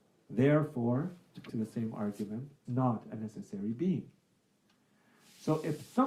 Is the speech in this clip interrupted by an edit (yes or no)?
yes